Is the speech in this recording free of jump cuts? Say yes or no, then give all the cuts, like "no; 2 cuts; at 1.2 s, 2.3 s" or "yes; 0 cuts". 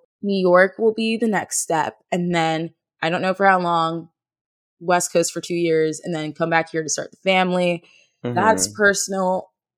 yes; 0 cuts